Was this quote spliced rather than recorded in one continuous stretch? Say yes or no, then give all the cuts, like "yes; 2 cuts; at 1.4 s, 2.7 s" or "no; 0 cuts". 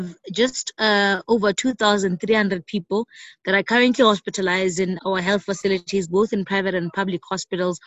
yes; 1 cut; at 5.0 s